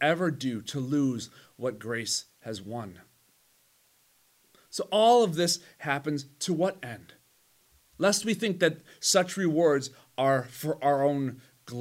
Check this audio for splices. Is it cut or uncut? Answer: uncut